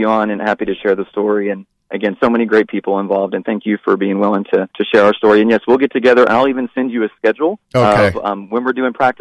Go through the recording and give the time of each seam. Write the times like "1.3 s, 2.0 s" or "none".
4.7 s, 7.6 s